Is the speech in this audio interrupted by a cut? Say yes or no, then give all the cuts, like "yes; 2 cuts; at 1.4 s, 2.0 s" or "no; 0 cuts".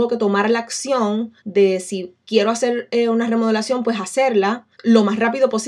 yes; 2 cuts; at 1.4 s, 4.7 s